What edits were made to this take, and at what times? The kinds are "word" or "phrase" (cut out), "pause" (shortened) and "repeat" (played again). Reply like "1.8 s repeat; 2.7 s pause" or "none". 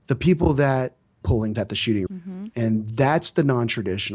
1.2 s phrase; 1.5 s word; 2.1 s word